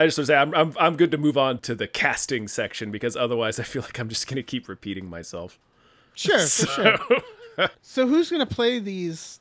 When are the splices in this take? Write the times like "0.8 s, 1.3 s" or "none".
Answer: 1.6 s, 7.7 s